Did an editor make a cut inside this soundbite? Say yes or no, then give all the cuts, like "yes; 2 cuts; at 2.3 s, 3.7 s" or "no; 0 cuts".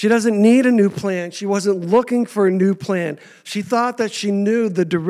no; 0 cuts